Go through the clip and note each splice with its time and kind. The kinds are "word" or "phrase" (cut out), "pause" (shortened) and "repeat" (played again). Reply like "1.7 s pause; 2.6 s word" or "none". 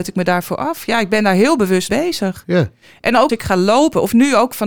1.9 s word; 3.3 s word